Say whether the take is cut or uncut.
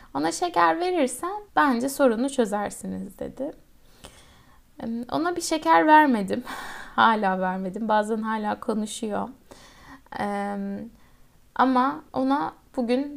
cut